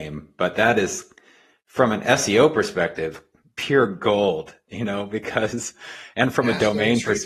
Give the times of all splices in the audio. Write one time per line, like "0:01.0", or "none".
none